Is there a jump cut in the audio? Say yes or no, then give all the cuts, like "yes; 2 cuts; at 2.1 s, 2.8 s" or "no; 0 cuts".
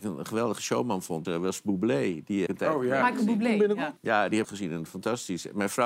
yes; 4 cuts; at 1.2 s, 2.5 s, 4.0 s, 4.4 s